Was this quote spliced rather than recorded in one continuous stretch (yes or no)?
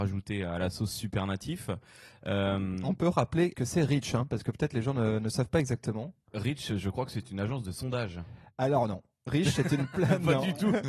yes